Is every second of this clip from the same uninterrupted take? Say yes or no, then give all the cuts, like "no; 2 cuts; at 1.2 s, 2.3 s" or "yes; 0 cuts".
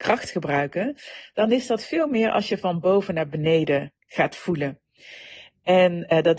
no; 1 cut; at 4.0 s